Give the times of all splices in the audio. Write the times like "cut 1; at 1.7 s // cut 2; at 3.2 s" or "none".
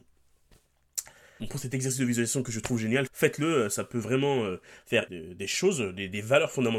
cut 1; at 1.4 s // cut 2; at 3.1 s // cut 3; at 5.1 s